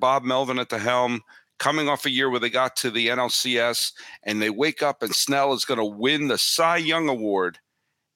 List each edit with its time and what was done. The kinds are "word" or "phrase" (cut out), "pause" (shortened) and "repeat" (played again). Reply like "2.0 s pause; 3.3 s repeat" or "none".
none